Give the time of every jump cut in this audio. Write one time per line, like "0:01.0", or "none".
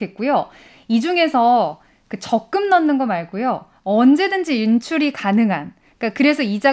none